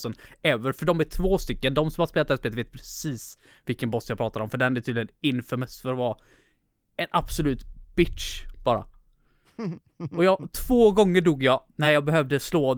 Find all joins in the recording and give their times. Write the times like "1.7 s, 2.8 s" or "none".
none